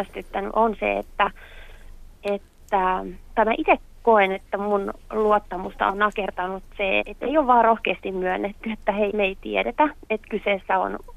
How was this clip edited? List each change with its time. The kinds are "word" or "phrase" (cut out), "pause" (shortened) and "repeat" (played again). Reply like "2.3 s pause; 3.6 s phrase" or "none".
2.2 s pause; 7.0 s word; 9.1 s word